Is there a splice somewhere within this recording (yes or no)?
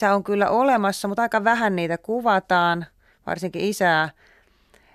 no